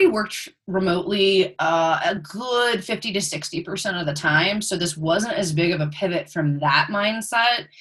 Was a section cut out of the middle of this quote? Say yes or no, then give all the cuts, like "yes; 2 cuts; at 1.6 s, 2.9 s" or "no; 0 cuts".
no; 0 cuts